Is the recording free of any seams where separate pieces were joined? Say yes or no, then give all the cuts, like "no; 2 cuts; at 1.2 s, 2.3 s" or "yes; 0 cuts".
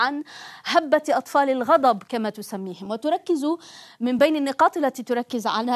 yes; 0 cuts